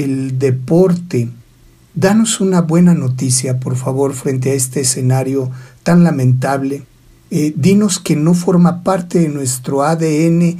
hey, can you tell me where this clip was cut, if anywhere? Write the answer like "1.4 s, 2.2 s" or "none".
none